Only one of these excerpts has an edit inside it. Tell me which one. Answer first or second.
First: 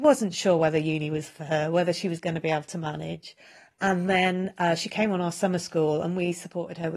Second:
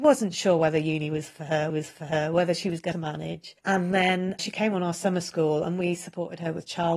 second